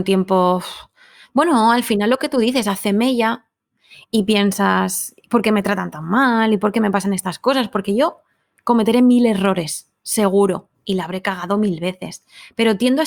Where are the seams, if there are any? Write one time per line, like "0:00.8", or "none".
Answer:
none